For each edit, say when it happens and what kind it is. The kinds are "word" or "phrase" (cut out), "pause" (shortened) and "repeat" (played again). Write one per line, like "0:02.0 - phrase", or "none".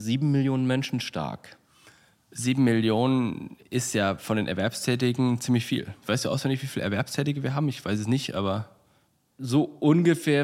none